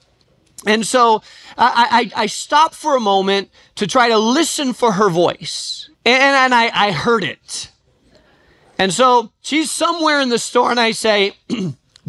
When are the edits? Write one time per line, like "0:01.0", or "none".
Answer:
0:05.9